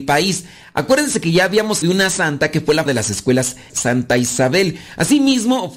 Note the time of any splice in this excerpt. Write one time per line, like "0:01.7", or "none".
0:01.8
0:02.9
0:03.7